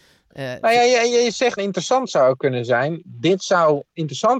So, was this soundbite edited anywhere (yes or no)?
yes